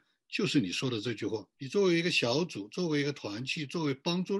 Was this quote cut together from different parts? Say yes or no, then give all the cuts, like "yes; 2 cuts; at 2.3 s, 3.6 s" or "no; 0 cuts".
yes; 1 cut; at 1.5 s